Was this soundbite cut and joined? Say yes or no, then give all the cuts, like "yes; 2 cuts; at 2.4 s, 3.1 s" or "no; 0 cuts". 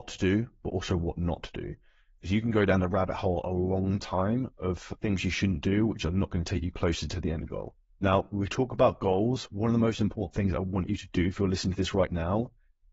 no; 0 cuts